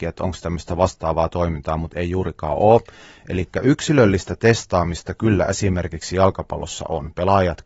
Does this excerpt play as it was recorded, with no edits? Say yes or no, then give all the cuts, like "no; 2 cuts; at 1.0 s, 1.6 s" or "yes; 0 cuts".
yes; 0 cuts